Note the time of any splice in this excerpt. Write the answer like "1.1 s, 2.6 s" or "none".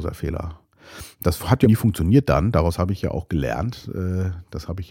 1.6 s